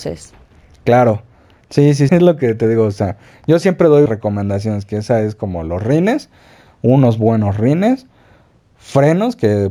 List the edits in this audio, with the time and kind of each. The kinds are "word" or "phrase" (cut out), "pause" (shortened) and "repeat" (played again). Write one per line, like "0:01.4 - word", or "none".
0:02.1 - word
0:04.1 - word